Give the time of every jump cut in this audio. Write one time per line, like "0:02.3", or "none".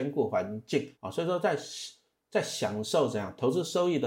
0:00.9